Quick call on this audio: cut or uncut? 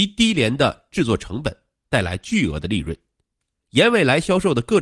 uncut